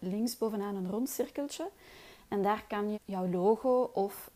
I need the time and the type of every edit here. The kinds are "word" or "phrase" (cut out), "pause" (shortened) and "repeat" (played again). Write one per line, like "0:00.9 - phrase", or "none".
0:02.9 - word